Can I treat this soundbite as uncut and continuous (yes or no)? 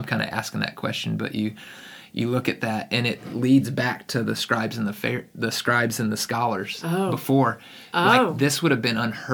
yes